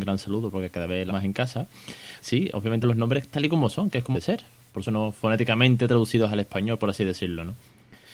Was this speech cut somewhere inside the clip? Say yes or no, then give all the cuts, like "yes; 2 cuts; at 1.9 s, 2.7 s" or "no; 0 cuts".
yes; 5 cuts; at 1.1 s, 2.2 s, 2.8 s, 4.1 s, 4.9 s